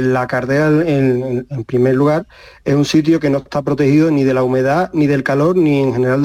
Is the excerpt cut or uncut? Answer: uncut